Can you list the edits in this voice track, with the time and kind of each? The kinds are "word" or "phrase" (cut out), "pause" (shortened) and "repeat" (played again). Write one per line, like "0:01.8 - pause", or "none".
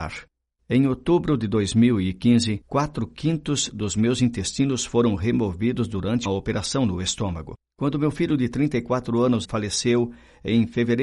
0:06.2 - word
0:09.4 - phrase